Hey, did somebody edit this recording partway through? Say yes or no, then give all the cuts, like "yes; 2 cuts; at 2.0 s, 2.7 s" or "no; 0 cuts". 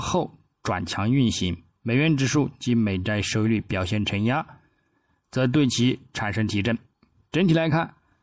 no; 0 cuts